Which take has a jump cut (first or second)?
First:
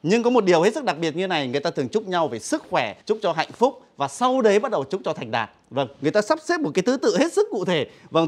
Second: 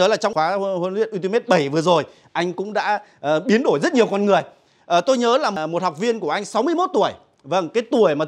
first